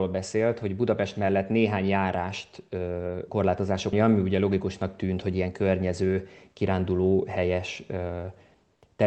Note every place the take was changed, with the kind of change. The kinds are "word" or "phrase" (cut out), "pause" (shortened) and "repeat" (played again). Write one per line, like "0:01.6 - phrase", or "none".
0:03.3 - phrase
0:03.9 - phrase